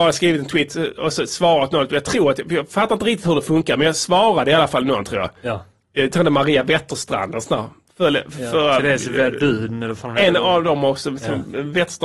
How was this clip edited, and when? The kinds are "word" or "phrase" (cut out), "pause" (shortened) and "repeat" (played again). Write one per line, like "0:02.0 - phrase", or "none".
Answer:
none

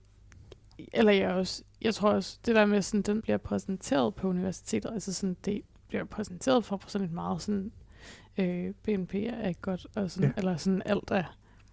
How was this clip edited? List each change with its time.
0:01.7 - pause
0:03.2 - phrase
0:08.8 - pause

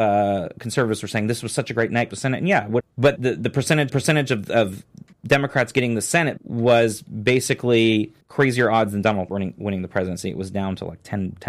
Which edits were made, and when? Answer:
0:02.1 - phrase
0:02.8 - phrase
0:03.2 - word
0:03.9 - repeat
0:05.1 - pause
0:06.4 - word
0:08.2 - pause
0:09.3 - word

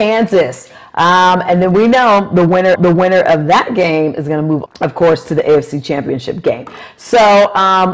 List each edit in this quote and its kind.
0:02.8 - repeat
0:04.7 - word

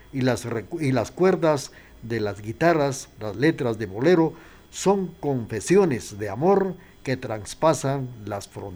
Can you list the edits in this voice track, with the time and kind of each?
none

